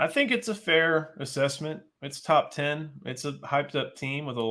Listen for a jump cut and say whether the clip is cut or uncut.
uncut